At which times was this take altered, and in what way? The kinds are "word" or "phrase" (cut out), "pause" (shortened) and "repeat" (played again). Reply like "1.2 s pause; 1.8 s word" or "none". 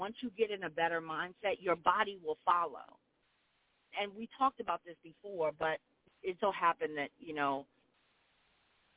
3.9 s word; 6.4 s word